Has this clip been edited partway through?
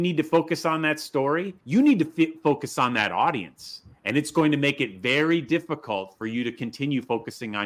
yes; 1 cut; at 1.6 s

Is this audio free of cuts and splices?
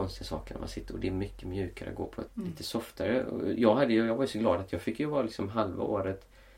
no; 1 cut; at 2.3 s

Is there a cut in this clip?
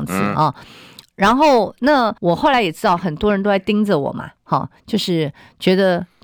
yes; 1 cut; at 2.2 s

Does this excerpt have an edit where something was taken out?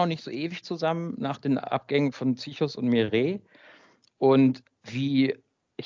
no; 0 cuts

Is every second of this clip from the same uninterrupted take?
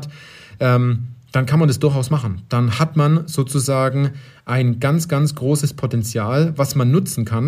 yes; 0 cuts

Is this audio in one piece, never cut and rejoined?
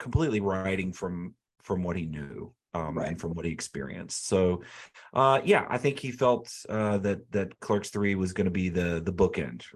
yes; 0 cuts

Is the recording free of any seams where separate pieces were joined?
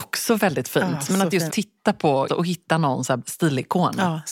no; 3 cuts; at 1.5 s, 2.3 s, 3.2 s

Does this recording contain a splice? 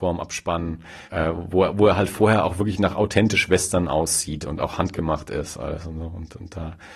yes; 1 cut; at 1.1 s

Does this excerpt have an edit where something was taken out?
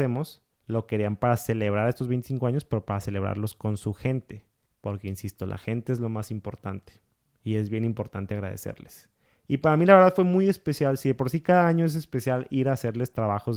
no; 0 cuts

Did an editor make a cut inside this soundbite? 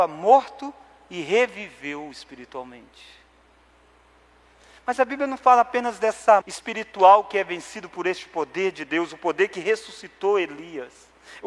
yes; 1 cut; at 6.4 s

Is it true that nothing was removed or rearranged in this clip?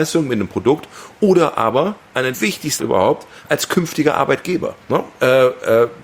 no; 3 cuts; at 2.3 s, 2.8 s, 4.8 s

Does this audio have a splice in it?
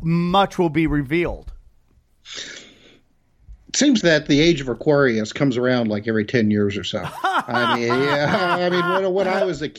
yes; 1 cut; at 4.0 s

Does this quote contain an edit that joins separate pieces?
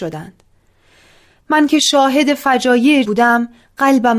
yes; 1 cut; at 3.0 s

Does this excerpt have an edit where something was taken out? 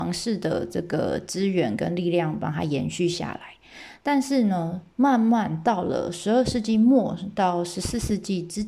no; 0 cuts

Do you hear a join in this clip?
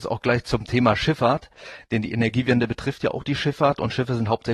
no; 0 cuts

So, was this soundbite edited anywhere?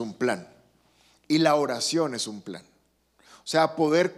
no; 0 cuts

